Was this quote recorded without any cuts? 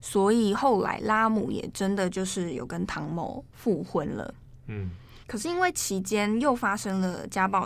no; 1 cut; at 5.2 s

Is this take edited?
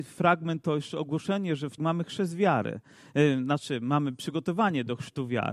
yes; 1 cut; at 1.8 s

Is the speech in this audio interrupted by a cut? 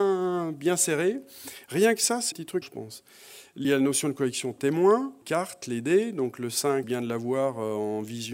yes; 5 cuts; at 2.3 s, 2.6 s, 3.6 s, 5.2 s, 6.8 s

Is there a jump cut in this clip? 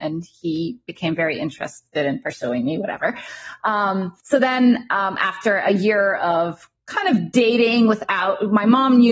yes; 2 cuts; at 1.9 s, 4.2 s

